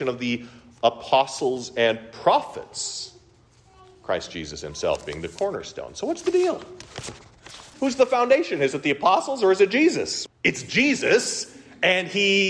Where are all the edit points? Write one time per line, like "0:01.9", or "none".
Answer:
0:07.7
0:10.3